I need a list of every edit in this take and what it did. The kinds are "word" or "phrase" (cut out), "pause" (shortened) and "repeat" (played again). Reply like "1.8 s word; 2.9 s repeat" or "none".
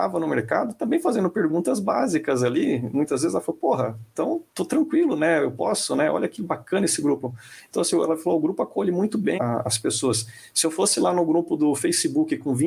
4.5 s pause; 9.4 s word